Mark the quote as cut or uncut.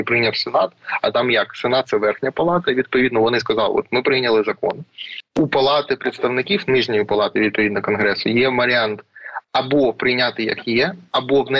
cut